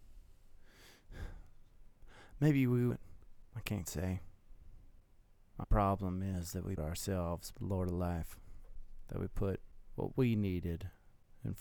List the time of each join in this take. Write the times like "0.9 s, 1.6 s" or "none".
2.9 s, 3.5 s, 3.8 s, 5.6 s, 6.8 s, 7.5 s

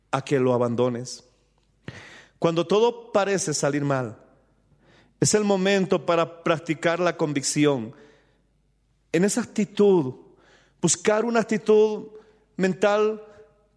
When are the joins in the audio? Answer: none

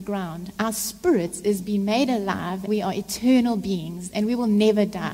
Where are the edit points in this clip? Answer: 2.7 s

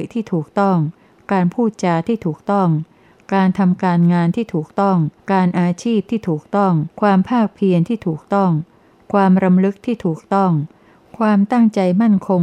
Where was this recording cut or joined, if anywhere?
5.2 s, 6.9 s

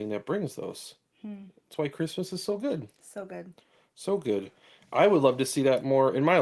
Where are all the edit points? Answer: none

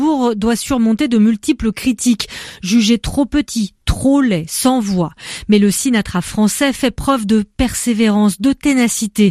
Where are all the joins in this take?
none

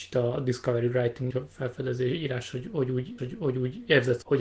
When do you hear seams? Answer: 1.3 s, 3.2 s

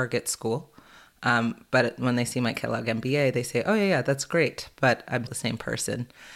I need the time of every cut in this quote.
5.3 s

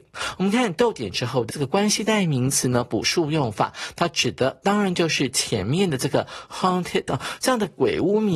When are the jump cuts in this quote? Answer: 1.5 s, 7.1 s

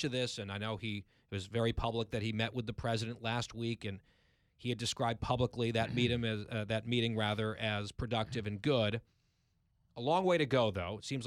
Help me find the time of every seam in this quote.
none

